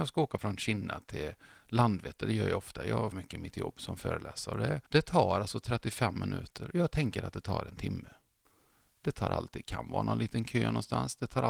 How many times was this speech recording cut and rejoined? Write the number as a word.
three